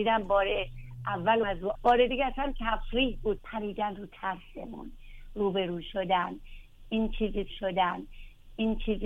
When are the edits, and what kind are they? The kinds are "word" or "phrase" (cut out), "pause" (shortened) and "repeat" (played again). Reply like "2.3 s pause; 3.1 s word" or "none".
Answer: 1.4 s word; 1.8 s phrase; 2.1 s word; 3.4 s word; 7.5 s repeat